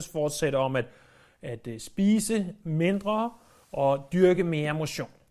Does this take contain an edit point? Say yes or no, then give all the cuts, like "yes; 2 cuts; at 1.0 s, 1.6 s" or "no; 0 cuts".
no; 0 cuts